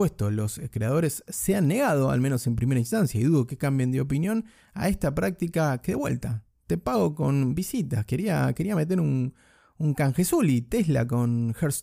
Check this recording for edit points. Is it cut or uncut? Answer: uncut